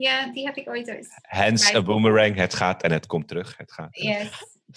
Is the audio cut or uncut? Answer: uncut